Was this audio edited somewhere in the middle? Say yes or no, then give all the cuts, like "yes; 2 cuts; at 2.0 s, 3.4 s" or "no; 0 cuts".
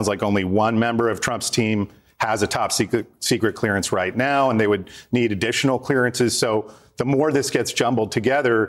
no; 0 cuts